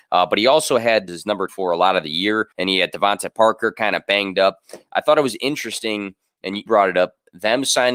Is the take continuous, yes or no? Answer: no